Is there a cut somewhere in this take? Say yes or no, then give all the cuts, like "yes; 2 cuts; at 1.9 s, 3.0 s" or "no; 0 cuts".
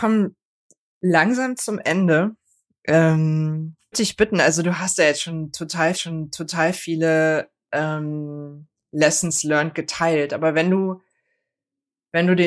yes; 2 cuts; at 3.9 s, 5.9 s